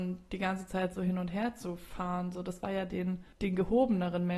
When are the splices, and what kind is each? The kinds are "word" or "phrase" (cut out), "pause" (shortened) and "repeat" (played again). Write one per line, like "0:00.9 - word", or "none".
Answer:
0:03.3 - pause